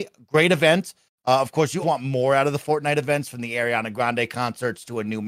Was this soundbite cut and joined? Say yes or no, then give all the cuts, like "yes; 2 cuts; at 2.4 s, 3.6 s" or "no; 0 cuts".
yes; 1 cut; at 1.8 s